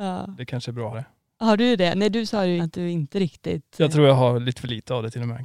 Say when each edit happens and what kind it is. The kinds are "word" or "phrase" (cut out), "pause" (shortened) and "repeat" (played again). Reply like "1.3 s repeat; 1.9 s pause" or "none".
0.9 s word; 2.6 s word